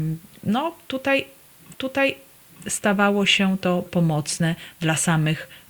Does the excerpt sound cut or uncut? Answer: cut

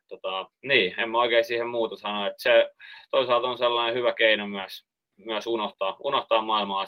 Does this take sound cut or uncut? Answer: uncut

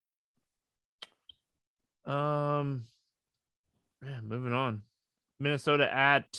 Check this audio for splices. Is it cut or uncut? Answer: uncut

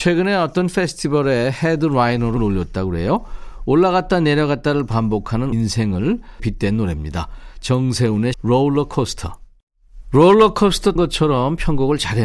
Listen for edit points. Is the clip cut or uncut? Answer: cut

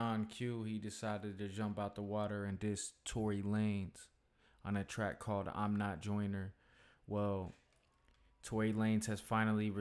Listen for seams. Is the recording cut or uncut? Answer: uncut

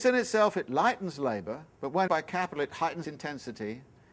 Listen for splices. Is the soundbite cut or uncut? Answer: cut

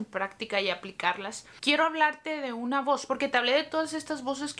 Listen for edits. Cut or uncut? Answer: uncut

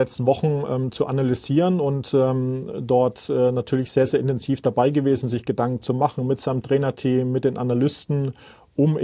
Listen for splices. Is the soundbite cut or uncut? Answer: uncut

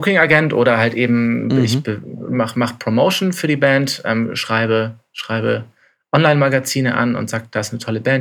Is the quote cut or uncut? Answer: uncut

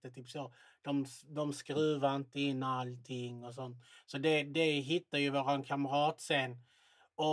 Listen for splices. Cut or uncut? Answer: uncut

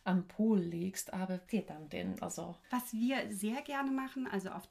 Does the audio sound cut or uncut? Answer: cut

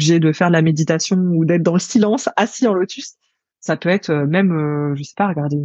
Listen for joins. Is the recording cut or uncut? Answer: uncut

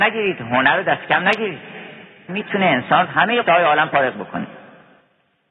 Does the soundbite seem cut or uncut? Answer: cut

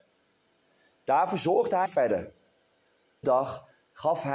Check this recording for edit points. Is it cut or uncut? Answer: cut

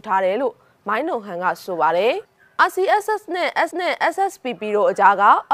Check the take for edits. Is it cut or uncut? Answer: cut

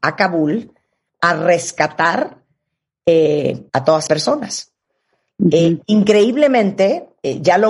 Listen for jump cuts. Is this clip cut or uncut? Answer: cut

